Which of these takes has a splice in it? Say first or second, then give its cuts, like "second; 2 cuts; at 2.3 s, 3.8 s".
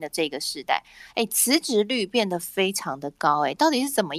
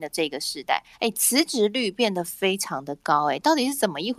second; 1 cut; at 0.9 s